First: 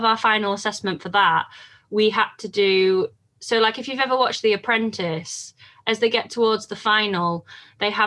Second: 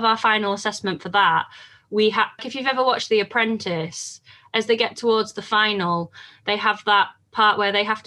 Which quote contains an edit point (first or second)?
second